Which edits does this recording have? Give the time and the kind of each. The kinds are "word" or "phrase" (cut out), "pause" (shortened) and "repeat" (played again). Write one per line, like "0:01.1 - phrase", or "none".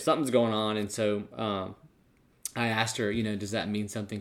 none